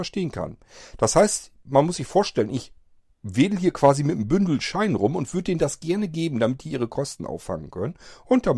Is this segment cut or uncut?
uncut